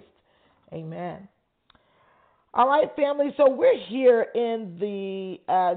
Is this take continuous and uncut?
yes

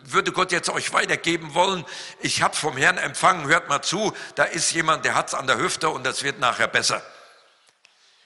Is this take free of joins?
yes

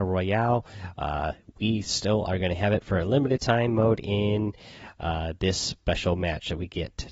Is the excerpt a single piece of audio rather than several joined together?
yes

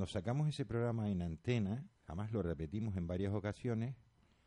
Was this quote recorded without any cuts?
no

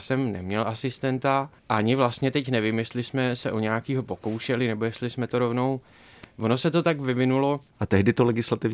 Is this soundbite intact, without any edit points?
no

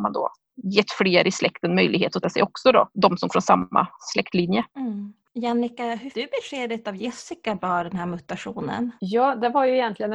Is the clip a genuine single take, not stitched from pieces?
no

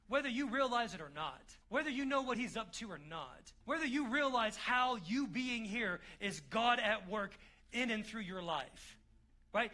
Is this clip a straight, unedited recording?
no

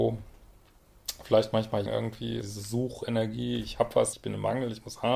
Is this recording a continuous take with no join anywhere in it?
no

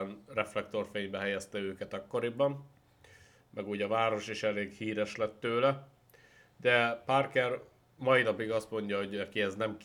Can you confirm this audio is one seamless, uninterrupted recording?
yes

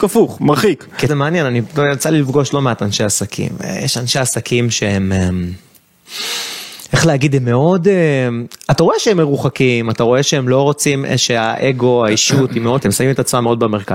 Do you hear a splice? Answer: yes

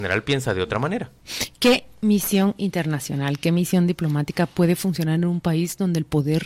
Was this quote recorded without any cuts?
yes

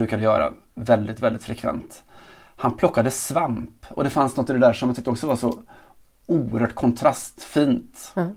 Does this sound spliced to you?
no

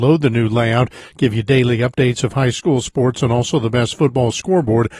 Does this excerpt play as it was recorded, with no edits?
yes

